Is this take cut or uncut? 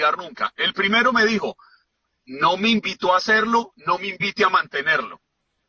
uncut